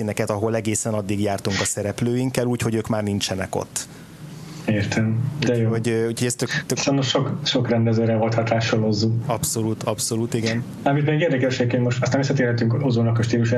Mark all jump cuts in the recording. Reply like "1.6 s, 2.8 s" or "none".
none